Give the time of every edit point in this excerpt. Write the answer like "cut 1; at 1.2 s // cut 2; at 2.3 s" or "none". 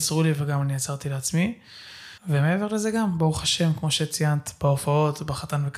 cut 1; at 2.2 s